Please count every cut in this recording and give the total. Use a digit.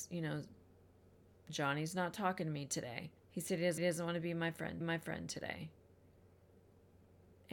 3